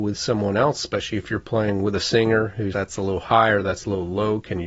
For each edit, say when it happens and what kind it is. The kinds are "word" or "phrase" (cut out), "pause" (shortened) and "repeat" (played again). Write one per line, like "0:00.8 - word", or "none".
0:02.7 - word